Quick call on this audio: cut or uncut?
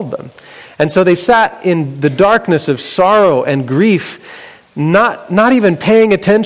uncut